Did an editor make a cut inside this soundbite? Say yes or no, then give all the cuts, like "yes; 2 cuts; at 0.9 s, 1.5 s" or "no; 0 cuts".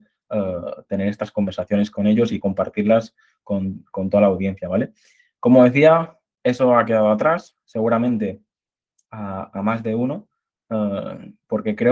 yes; 1 cut; at 9.1 s